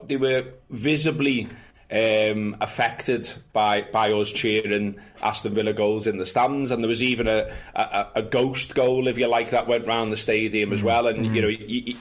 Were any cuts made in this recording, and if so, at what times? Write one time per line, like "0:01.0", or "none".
none